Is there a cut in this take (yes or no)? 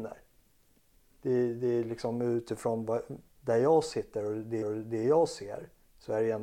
yes